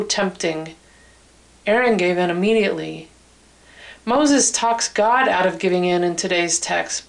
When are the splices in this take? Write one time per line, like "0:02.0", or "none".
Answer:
none